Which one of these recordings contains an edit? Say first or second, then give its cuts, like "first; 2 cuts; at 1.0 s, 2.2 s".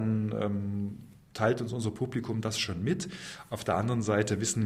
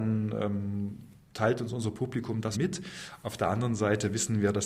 second; 1 cut; at 2.5 s